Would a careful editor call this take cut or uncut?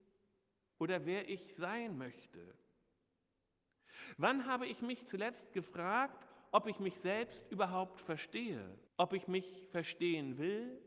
cut